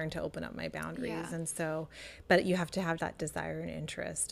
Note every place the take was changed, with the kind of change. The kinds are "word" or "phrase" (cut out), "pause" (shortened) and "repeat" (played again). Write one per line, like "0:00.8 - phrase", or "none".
0:03.0 - word